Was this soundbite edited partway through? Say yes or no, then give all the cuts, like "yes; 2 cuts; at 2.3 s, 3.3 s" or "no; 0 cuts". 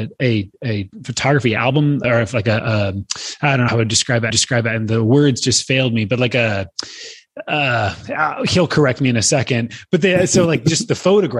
yes; 3 cuts; at 2.0 s, 3.7 s, 4.3 s